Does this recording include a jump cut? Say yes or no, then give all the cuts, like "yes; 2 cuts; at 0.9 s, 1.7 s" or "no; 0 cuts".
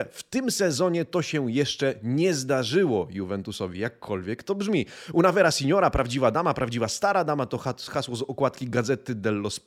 no; 0 cuts